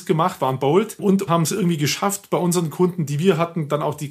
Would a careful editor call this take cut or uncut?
cut